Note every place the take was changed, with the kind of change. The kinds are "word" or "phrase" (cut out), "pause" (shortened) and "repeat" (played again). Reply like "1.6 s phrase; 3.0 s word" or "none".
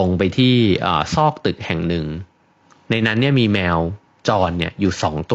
none